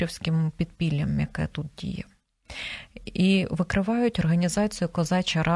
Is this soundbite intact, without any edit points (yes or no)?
yes